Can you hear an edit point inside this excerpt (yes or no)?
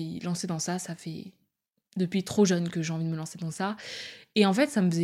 no